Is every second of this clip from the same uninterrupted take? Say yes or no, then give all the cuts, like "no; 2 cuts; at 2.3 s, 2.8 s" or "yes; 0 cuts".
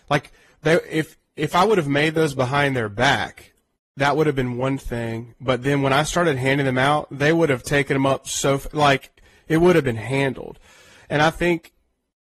yes; 0 cuts